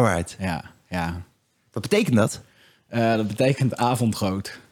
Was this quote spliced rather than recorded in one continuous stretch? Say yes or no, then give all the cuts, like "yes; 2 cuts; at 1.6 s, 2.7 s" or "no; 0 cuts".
no; 0 cuts